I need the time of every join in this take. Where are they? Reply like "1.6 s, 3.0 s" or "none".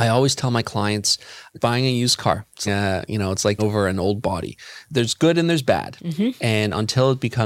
1.6 s, 2.7 s, 3.6 s

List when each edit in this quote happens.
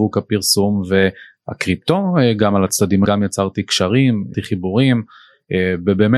3.1 s, 4.3 s

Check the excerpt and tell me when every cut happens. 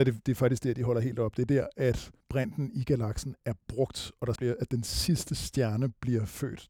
2.2 s, 4.4 s

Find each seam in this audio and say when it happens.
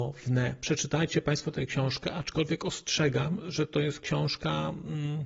none

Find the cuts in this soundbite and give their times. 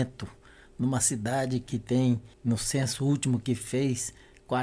2.3 s

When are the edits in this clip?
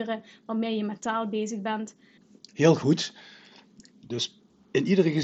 2.2 s

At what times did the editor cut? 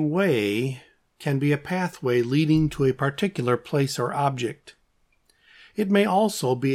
none

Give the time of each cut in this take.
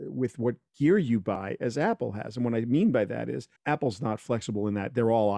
3.6 s

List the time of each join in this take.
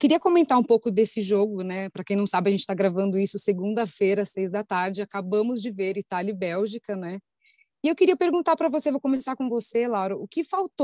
none

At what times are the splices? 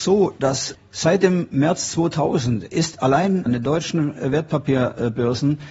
3.5 s

